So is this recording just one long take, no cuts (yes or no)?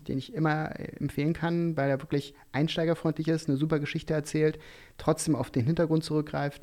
yes